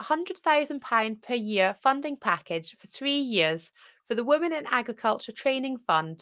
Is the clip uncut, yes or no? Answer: yes